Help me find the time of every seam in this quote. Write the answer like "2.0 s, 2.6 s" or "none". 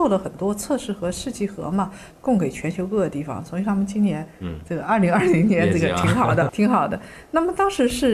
6.5 s